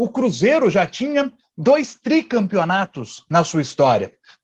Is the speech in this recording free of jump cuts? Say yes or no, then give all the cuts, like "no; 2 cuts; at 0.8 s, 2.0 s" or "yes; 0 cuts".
yes; 0 cuts